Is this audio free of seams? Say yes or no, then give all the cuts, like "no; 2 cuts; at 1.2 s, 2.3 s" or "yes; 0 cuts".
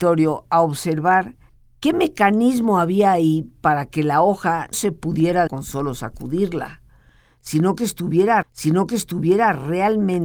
no; 4 cuts; at 1.5 s, 4.7 s, 5.5 s, 8.4 s